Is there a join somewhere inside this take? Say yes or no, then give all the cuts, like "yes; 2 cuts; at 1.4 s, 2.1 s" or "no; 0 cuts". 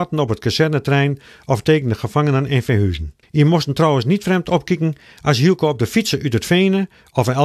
yes; 1 cut; at 3.2 s